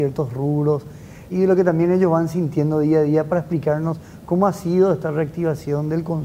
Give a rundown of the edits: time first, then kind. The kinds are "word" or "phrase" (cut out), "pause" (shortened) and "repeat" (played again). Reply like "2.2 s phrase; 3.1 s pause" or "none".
1.3 s word